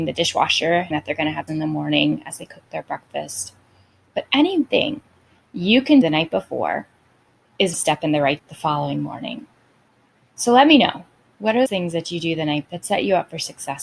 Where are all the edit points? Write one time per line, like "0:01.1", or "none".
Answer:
0:00.9
0:01.5
0:04.7
0:06.0
0:07.7
0:08.4
0:11.7
0:12.6